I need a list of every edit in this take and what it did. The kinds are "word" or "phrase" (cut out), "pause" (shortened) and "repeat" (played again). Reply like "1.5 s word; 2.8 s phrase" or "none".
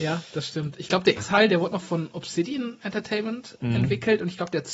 1.2 s word; 3.6 s word